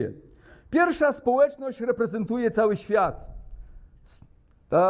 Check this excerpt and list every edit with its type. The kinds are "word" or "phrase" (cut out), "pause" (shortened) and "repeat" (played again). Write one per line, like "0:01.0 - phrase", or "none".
none